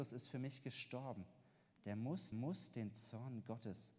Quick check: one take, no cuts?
no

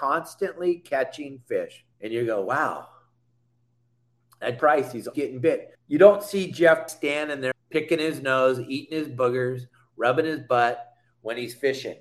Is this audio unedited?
no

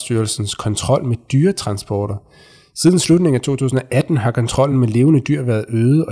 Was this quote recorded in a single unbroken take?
yes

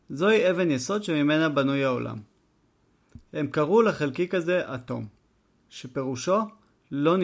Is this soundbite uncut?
yes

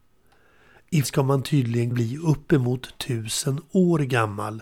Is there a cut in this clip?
yes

